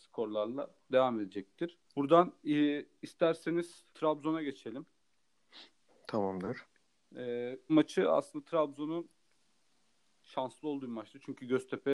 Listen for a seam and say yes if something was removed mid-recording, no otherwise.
yes